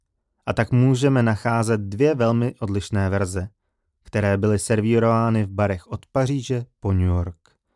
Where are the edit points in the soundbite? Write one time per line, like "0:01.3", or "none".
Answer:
none

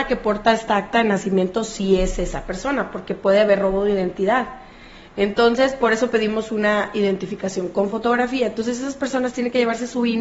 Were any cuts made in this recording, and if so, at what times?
none

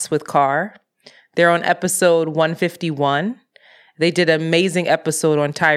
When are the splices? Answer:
none

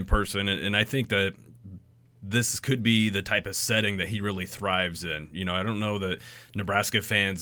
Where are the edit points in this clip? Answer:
none

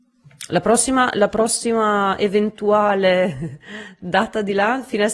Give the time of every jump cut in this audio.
none

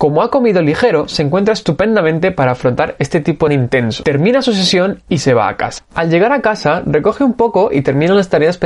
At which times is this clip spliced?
0:03.5

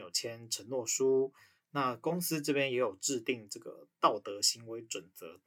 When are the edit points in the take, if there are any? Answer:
none

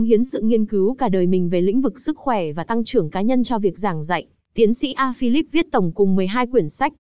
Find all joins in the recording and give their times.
none

